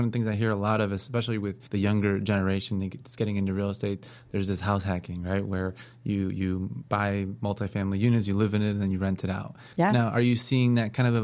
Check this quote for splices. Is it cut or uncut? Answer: cut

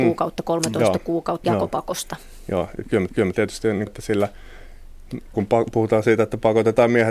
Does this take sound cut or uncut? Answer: cut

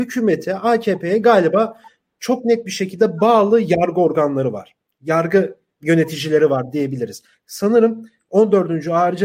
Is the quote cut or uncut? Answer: uncut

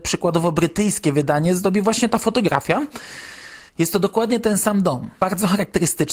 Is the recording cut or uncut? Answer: cut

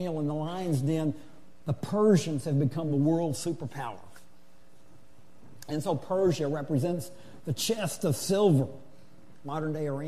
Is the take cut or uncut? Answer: uncut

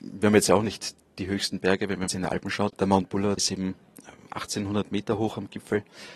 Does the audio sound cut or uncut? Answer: cut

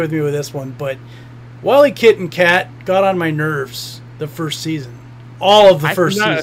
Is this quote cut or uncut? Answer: uncut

